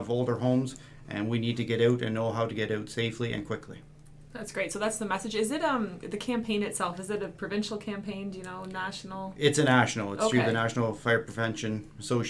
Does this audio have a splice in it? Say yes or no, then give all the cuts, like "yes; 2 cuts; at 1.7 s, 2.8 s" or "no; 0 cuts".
no; 0 cuts